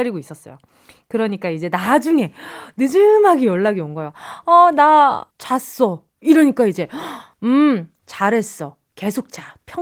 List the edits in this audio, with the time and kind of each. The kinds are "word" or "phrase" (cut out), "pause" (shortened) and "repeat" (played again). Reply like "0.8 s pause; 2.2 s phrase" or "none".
6.1 s pause

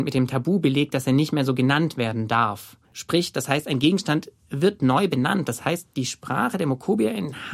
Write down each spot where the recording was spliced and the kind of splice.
2.8 s pause

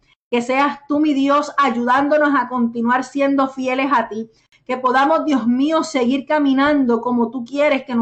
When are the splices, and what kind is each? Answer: none

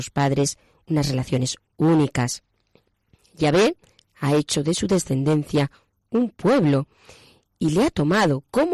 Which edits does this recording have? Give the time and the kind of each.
none

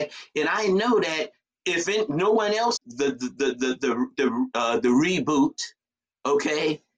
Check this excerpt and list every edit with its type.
1.4 s pause; 2.8 s phrase

